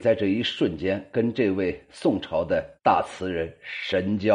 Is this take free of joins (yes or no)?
no